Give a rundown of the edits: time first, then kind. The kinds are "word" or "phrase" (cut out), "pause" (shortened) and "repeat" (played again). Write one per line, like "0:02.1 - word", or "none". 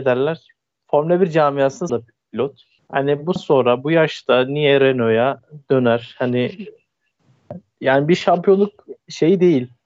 0:01.9 - phrase
0:02.8 - pause
0:03.4 - word